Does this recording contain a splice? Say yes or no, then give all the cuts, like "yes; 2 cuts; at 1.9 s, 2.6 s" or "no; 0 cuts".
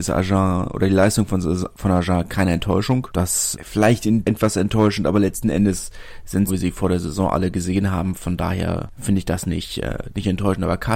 yes; 3 cuts; at 3.5 s, 4.2 s, 6.5 s